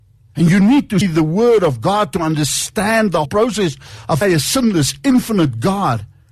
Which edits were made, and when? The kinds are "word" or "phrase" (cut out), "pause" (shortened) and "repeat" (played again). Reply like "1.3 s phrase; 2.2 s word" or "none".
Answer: 1.0 s word; 3.3 s word; 4.2 s word